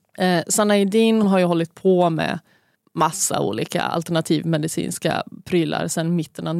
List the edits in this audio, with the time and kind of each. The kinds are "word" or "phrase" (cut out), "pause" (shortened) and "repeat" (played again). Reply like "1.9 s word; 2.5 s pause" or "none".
1.2 s word; 2.8 s pause